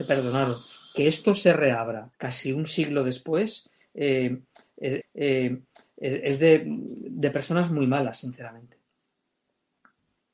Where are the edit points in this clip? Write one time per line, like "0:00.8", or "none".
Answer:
0:02.2
0:05.0